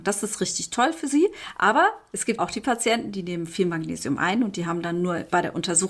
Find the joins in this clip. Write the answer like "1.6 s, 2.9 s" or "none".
2.4 s